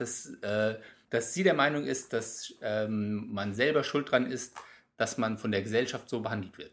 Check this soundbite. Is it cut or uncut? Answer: uncut